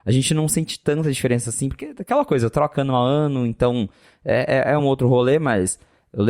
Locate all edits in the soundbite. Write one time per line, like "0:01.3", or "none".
none